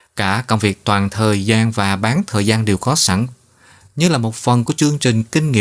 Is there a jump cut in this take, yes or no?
no